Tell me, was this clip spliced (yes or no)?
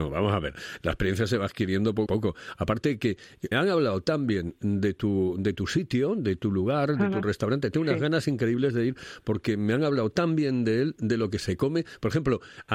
yes